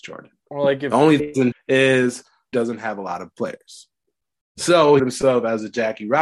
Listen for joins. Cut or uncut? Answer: cut